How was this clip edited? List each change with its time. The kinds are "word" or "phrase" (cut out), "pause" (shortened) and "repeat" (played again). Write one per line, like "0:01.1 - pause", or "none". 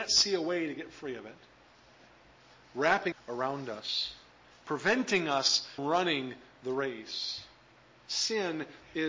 0:03.1 - word
0:05.8 - word